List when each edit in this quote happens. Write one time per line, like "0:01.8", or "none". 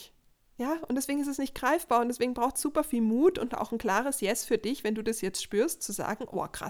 none